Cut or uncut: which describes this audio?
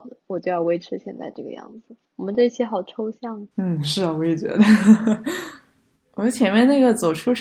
cut